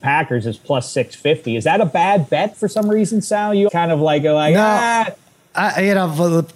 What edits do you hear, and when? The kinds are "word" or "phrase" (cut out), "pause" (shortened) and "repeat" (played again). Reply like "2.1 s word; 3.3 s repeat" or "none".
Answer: 3.7 s word